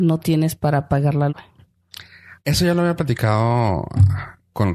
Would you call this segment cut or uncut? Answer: cut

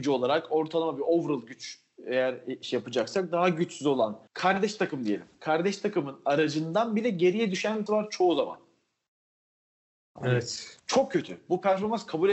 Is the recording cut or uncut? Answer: cut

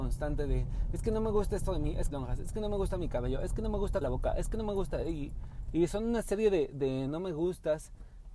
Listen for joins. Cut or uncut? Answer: cut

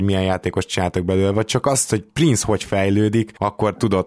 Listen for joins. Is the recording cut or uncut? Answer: uncut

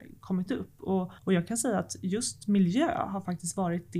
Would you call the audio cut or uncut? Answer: cut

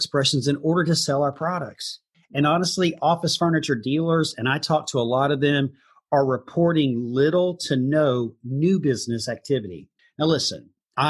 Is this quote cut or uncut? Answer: uncut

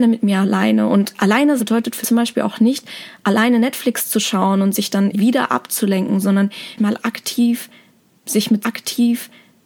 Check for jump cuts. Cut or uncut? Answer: cut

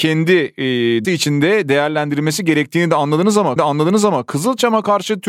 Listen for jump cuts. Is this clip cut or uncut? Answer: cut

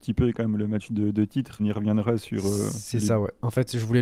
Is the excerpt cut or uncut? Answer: cut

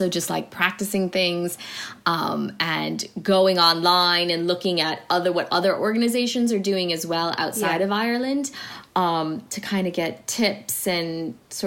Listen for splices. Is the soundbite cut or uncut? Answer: uncut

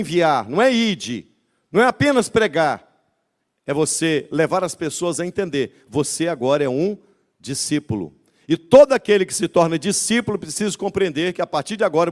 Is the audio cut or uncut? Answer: uncut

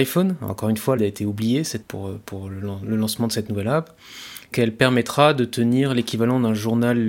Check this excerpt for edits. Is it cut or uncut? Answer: cut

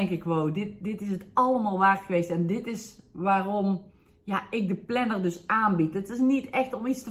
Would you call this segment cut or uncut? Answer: uncut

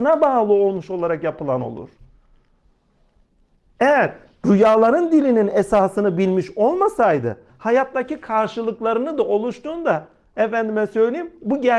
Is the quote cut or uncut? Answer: uncut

